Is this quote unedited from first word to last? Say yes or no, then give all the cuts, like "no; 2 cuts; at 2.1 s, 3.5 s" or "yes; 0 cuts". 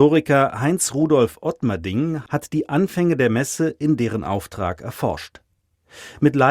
yes; 0 cuts